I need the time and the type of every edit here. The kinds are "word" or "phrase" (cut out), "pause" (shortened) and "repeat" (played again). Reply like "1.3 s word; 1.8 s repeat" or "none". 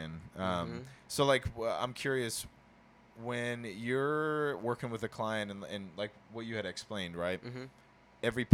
none